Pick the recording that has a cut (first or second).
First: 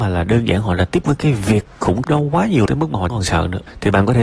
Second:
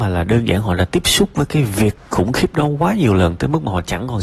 first